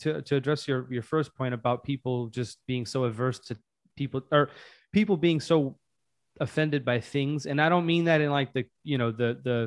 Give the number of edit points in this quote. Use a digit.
0